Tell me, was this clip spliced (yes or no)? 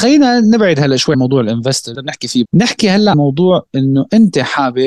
yes